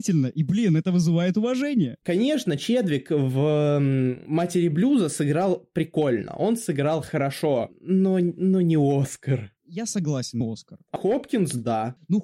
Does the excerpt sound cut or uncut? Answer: cut